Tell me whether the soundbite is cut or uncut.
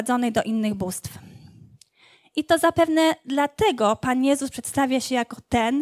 uncut